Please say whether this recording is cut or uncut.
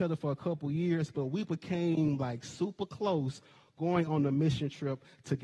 uncut